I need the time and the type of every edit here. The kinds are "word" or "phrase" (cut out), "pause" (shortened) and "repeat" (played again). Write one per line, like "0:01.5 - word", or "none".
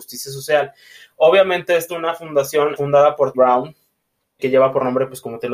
0:01.9 - word
0:02.8 - word
0:03.3 - word
0:04.4 - word